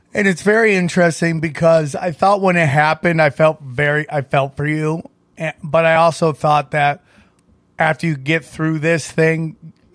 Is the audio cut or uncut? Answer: uncut